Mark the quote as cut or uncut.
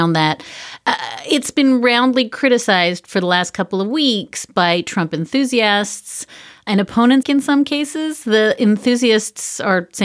cut